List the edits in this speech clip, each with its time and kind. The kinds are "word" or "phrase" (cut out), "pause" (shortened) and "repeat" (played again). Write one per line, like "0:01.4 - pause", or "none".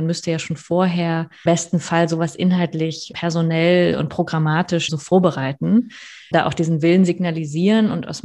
0:01.5 - word
0:03.1 - word
0:04.9 - word
0:06.3 - word

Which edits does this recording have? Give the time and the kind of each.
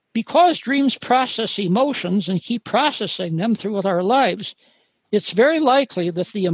none

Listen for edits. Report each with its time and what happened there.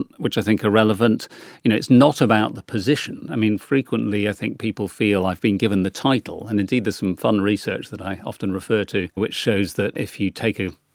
none

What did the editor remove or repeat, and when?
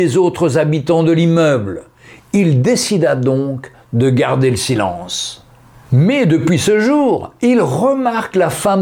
none

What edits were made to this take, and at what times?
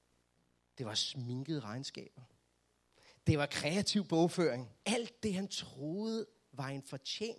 0:04.8 - pause

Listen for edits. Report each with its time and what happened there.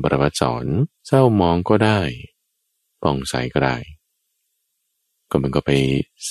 0:00.9 - pause

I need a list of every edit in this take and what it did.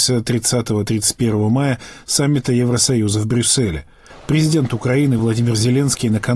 none

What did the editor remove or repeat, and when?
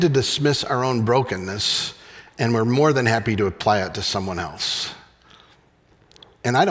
none

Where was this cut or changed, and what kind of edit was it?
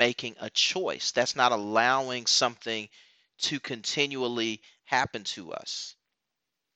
none

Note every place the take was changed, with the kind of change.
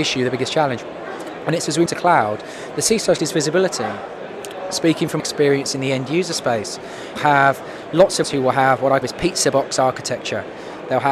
0:01.9 - word
0:03.2 - word
0:05.2 - word
0:07.2 - word
0:08.2 - word
0:09.0 - word

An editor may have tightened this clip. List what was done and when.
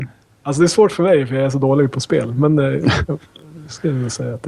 none

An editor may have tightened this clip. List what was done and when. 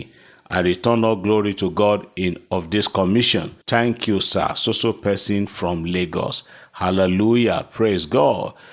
0:03.6 - pause

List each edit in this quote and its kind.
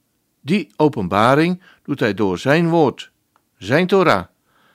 none

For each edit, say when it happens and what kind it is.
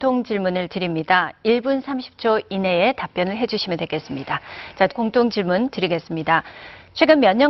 0:04.9 - word

